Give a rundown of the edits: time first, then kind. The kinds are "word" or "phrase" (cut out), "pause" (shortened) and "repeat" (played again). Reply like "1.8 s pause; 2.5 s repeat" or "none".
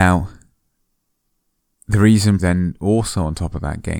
2.4 s word